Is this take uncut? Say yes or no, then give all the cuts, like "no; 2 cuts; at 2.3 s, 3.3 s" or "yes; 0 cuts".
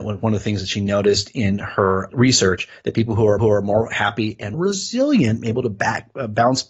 no; 3 cuts; at 2.1 s, 3.4 s, 4.5 s